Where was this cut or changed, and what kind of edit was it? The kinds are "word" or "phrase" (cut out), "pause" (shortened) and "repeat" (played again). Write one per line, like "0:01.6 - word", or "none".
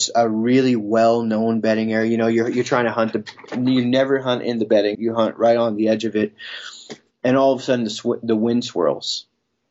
0:04.9 - phrase